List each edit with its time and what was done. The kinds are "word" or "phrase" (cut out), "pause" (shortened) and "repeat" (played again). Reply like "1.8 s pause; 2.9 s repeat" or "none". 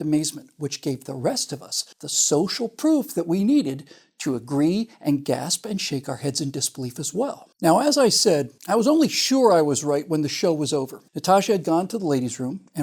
1.9 s pause; 7.5 s pause; 8.6 s pause; 11.1 s pause